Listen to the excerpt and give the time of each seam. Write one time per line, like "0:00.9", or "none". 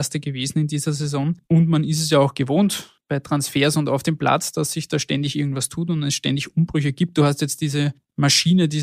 0:01.4